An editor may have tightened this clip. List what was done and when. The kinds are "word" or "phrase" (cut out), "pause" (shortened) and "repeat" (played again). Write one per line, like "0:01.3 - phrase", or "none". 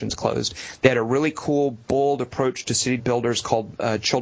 0:03.0 - phrase